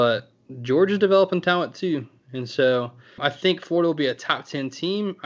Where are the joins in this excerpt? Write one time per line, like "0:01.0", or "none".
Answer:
0:03.2